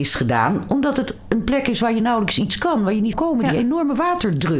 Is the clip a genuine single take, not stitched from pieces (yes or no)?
no